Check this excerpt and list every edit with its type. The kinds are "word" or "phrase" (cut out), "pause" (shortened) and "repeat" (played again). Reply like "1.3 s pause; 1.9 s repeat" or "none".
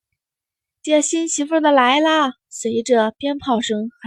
2.4 s pause

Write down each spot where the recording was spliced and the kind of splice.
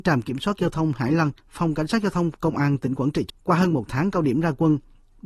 1.4 s pause; 3.3 s word

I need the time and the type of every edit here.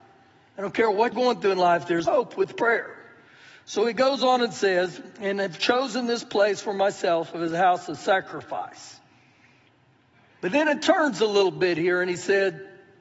1.1 s word; 2.1 s word

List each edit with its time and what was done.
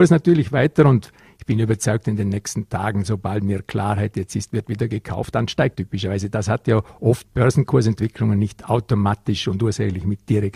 5.3 s word; 5.7 s word; 7.2 s word

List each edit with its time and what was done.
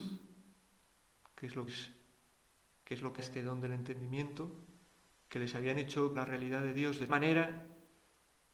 1.7 s word; 3.2 s word; 6.1 s word; 7.1 s word

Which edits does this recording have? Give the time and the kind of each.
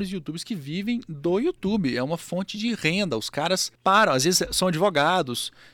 3.8 s pause

